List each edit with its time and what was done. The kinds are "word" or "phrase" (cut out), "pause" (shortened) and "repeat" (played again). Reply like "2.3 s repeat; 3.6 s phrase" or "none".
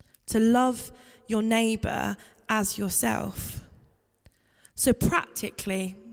none